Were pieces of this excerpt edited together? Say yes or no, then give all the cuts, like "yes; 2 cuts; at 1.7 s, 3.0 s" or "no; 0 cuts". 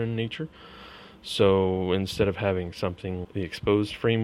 yes; 1 cut; at 3.2 s